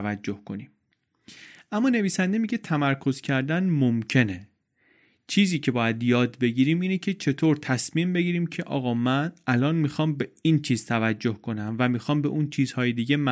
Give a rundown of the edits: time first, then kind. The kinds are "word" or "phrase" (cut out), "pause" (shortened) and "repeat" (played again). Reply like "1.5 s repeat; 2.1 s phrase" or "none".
none